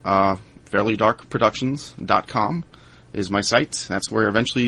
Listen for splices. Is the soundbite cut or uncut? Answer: uncut